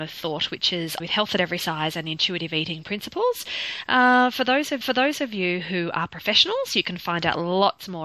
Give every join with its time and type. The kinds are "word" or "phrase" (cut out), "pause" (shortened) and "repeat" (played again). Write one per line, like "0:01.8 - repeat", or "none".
0:01.0 - word
0:04.8 - repeat